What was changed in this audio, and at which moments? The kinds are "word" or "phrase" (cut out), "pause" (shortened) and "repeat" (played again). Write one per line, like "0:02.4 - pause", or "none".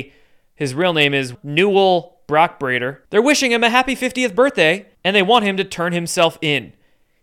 0:01.3 - word
0:03.0 - pause
0:04.9 - pause